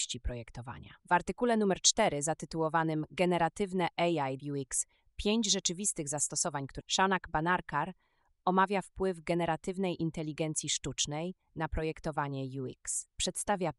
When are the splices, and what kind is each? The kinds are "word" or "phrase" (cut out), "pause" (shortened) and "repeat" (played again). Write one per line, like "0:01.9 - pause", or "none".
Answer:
0:01.0 - pause
0:04.4 - phrase
0:06.8 - word